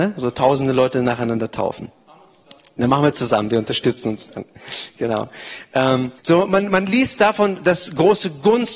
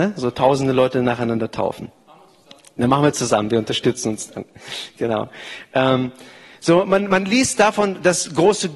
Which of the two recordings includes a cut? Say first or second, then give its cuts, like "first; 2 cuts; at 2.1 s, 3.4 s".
first; 1 cut; at 6.2 s